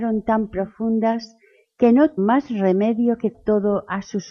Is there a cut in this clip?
yes; 2 cuts; at 2.2 s, 3.3 s

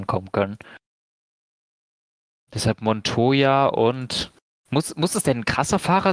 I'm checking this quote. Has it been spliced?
no; 0 cuts

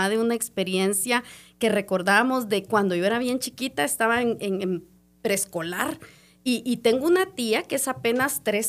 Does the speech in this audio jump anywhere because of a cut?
no; 0 cuts

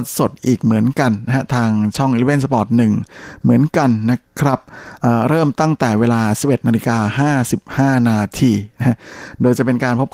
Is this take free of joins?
yes; 0 cuts

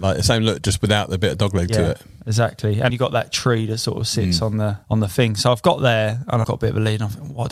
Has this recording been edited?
yes; 3 cuts; at 2.9 s, 4.8 s, 6.4 s

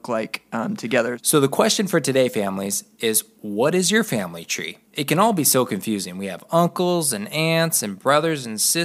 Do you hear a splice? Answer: yes; 1 cut; at 4.9 s

